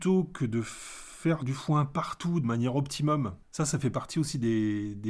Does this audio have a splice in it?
yes; 1 cut; at 3.4 s

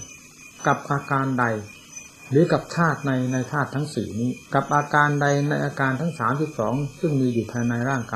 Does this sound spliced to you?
yes; 1 cut; at 4.5 s

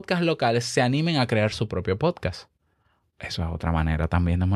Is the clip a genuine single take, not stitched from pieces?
yes; 0 cuts

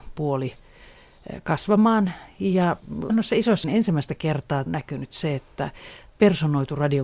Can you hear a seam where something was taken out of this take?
yes; 4 cuts; at 3.1 s, 3.6 s, 4.7 s, 6.1 s

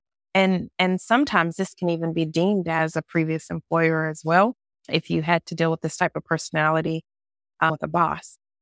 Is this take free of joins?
no; 1 cut; at 4.7 s

